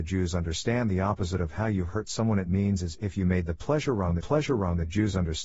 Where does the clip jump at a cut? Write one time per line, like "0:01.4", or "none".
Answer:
0:04.2